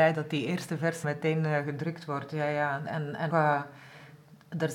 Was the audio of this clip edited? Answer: yes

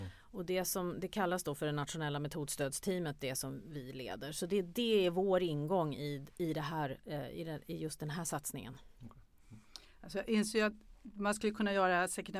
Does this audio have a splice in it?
no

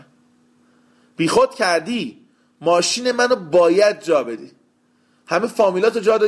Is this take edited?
no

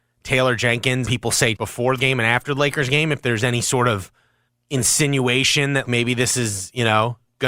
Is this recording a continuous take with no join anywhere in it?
no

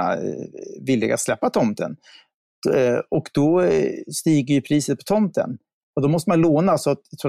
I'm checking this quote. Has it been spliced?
no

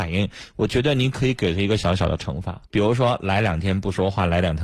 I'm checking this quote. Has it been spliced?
yes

